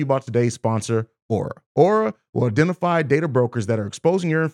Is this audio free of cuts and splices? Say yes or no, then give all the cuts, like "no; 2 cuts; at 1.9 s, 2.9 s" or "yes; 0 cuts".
no; 1 cut; at 1.6 s